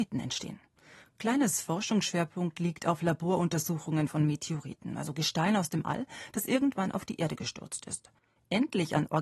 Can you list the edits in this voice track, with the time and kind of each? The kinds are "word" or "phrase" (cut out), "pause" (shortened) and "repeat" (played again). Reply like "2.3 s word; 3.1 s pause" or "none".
none